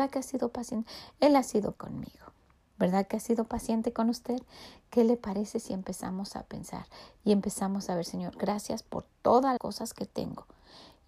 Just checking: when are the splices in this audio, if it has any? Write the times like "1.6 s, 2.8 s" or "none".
1.7 s, 9.6 s